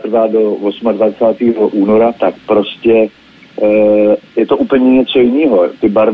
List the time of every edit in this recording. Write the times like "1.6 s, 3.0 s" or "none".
2.2 s